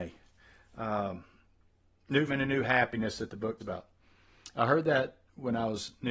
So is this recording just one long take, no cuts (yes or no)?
no